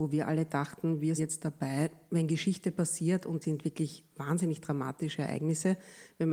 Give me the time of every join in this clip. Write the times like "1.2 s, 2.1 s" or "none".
1.2 s, 3.4 s